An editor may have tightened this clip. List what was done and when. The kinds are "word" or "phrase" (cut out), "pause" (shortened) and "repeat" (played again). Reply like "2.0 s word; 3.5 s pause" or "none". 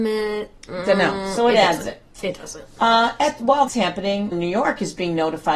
3.7 s word; 4.3 s phrase